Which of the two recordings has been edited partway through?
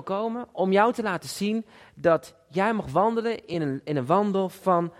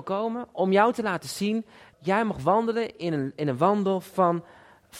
second; 1 cut; at 1.9 s

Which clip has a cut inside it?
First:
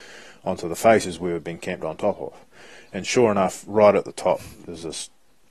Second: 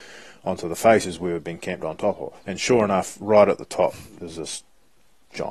second; 1 cut; at 2.4 s

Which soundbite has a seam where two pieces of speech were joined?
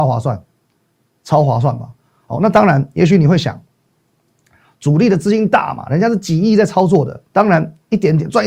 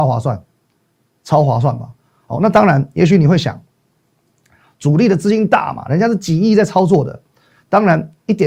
first; 1 cut; at 7.3 s

